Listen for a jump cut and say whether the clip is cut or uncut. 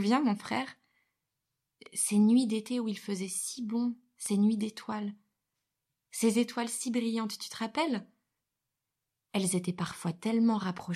uncut